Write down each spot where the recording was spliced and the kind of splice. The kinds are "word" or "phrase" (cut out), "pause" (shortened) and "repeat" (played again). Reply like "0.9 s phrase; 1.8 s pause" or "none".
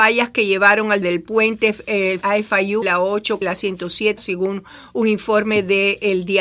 1.0 s word; 2.2 s word; 2.8 s word; 3.4 s word; 4.2 s word